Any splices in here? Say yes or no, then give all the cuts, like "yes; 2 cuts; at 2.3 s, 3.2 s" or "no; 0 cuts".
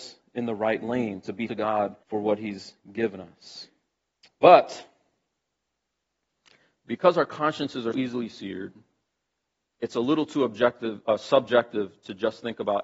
yes; 5 cuts; at 1.5 s, 2.0 s, 4.0 s, 7.9 s, 9.0 s